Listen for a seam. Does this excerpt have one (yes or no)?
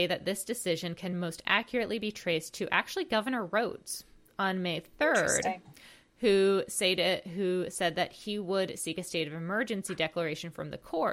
no